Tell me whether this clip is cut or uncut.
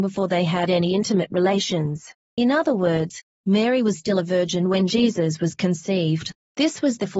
uncut